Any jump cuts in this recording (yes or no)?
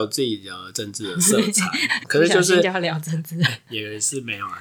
yes